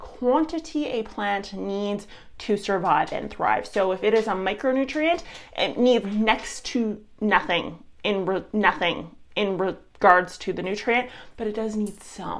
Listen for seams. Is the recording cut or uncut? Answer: cut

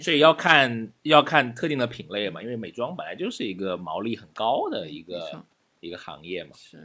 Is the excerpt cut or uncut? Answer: uncut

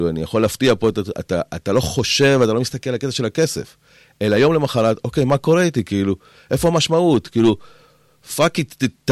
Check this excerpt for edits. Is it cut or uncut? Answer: uncut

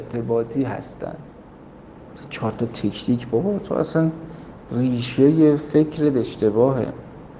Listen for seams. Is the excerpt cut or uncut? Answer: uncut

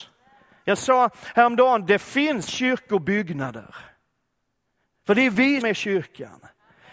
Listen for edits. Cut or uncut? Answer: cut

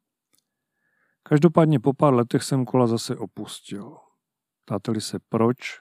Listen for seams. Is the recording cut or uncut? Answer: uncut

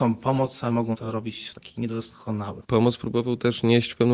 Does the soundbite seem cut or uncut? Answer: cut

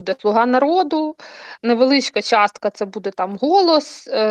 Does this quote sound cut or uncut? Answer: uncut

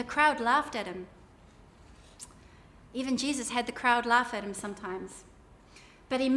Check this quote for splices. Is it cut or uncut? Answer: uncut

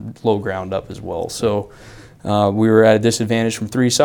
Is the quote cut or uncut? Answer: uncut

